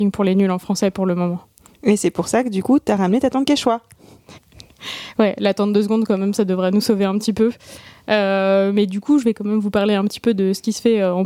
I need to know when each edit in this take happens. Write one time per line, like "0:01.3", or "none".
0:04.4